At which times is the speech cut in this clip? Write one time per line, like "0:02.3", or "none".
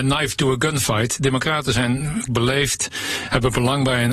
0:02.3